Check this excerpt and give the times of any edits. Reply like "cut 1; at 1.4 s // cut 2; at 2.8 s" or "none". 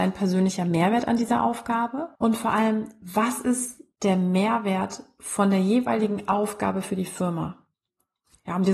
cut 1; at 2.2 s // cut 2; at 3.9 s